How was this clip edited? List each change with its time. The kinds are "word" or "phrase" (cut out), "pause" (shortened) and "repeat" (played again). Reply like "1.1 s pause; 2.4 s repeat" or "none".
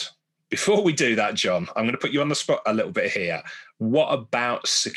none